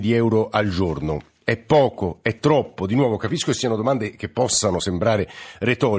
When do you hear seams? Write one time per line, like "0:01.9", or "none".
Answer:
none